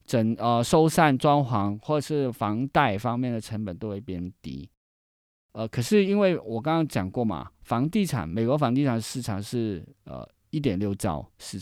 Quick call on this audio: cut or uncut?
uncut